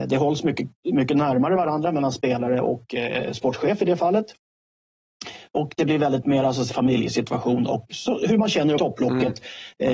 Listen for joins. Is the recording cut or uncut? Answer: cut